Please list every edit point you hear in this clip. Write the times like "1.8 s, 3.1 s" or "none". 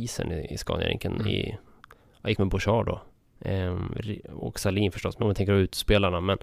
2.4 s, 4.5 s, 5.2 s